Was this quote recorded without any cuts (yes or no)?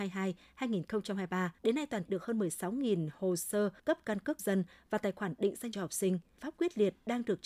no